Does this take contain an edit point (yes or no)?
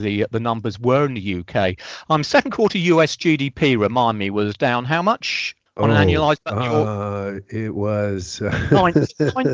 yes